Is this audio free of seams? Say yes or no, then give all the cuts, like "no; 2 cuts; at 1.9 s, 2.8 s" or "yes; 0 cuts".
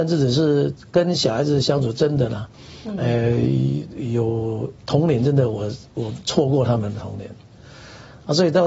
no; 1 cut; at 4.8 s